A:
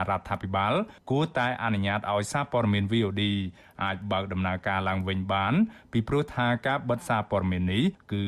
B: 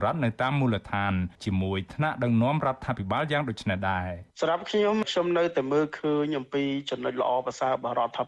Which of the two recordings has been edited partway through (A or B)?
B